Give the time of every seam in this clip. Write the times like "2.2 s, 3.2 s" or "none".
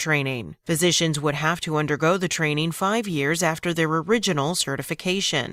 none